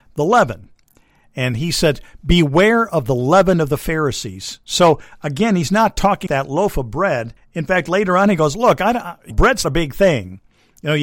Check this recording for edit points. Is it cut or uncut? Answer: cut